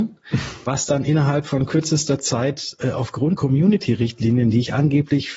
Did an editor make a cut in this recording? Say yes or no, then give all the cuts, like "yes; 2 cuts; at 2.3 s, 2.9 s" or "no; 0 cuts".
yes; 1 cut; at 3.4 s